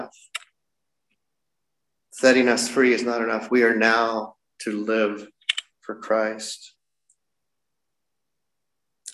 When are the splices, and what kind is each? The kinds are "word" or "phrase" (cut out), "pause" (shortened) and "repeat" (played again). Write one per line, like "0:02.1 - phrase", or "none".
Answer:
0:05.7 - pause